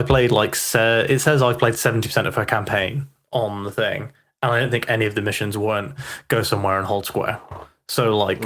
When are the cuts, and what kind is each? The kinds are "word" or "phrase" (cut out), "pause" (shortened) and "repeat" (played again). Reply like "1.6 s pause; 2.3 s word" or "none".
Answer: none